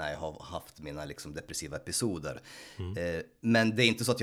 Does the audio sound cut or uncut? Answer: uncut